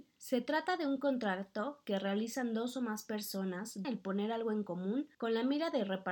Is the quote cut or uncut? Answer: cut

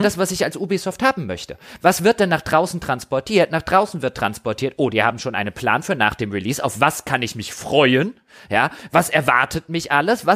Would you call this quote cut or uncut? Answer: uncut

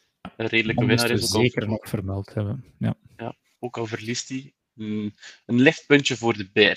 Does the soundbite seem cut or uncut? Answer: uncut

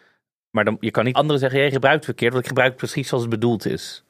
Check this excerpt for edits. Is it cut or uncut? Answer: cut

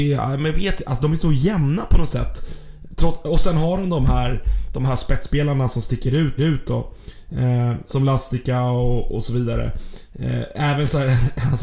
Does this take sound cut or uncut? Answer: cut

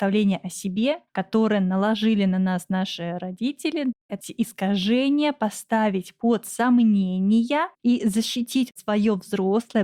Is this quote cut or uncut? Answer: cut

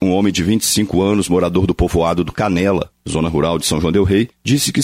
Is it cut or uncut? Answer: uncut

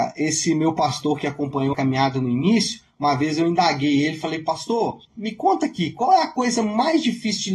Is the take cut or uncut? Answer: cut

